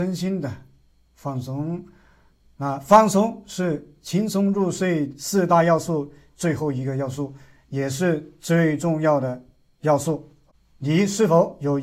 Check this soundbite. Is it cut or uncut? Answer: uncut